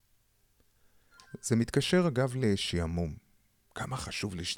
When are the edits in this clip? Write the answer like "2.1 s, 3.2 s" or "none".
none